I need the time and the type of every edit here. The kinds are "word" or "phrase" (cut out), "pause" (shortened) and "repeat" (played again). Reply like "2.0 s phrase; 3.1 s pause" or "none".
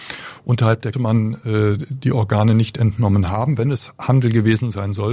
0.9 s phrase